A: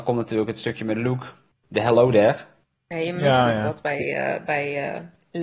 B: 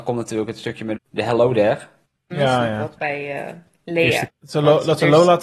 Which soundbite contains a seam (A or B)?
B